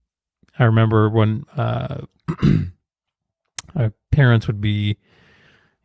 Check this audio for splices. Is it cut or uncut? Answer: uncut